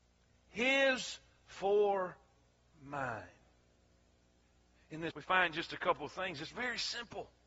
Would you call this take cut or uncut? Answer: cut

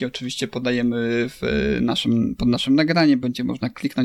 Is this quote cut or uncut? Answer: uncut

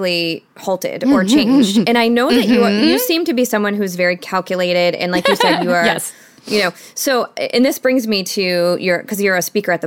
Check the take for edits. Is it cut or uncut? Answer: uncut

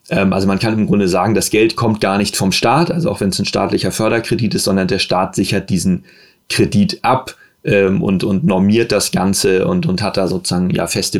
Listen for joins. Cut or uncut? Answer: uncut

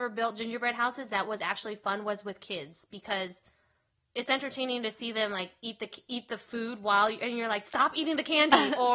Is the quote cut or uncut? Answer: uncut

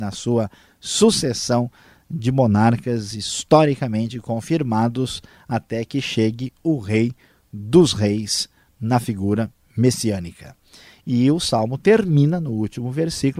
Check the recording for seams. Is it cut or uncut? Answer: uncut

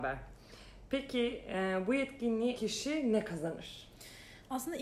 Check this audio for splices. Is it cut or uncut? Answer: cut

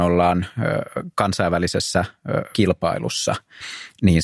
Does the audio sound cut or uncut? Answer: cut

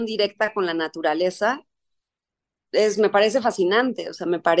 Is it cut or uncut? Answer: cut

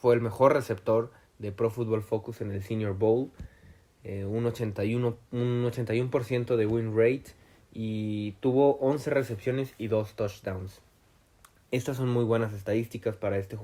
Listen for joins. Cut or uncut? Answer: cut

